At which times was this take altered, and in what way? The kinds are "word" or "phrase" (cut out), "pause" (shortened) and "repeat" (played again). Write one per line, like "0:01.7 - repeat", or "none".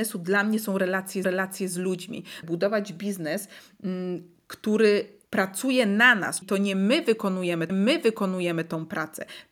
0:01.2 - repeat
0:02.4 - phrase
0:05.3 - pause
0:06.4 - word
0:07.7 - repeat